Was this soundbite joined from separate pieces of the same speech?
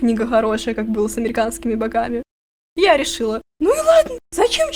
yes; 1 cut; at 3.5 s

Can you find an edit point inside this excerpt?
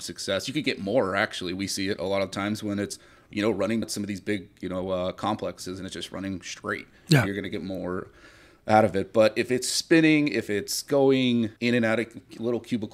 yes; 2 cuts; at 3.8 s, 11.6 s

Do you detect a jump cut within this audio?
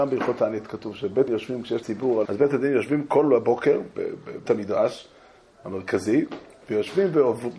yes; 5 cuts; at 1.3 s, 1.8 s, 2.2 s, 3.9 s, 4.5 s

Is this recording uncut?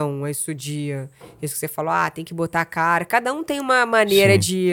yes; 0 cuts

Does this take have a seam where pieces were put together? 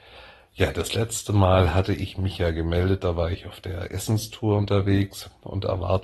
no; 0 cuts

